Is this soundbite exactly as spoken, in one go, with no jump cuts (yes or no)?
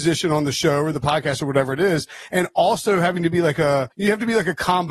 no